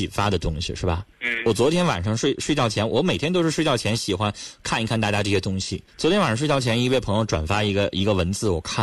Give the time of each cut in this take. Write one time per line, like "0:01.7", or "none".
0:01.1
0:05.9